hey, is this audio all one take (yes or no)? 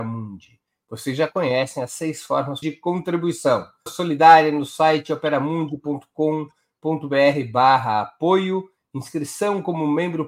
no